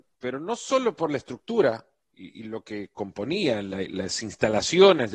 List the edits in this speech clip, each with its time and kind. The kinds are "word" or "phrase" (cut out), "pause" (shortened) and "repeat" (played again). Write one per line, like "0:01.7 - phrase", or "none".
none